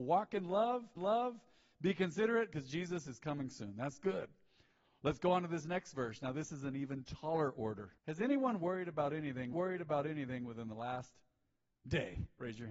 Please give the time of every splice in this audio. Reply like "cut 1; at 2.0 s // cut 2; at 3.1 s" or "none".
cut 1; at 1.0 s // cut 2; at 8.0 s // cut 3; at 9.5 s